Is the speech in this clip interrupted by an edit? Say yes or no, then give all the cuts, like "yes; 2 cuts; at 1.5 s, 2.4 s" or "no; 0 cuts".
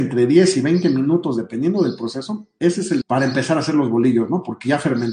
yes; 1 cut; at 3.0 s